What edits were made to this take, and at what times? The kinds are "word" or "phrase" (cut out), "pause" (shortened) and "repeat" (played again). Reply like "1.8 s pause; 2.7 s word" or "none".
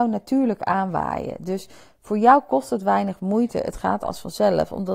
none